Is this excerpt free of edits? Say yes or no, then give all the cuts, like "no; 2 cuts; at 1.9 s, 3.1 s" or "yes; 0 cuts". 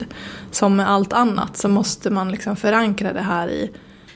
yes; 0 cuts